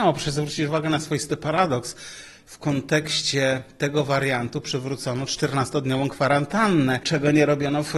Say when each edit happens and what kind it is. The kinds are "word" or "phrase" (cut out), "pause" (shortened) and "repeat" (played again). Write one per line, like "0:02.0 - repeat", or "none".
none